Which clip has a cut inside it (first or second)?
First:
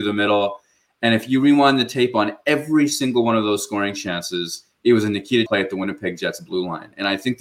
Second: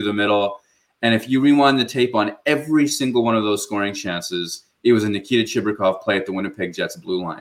first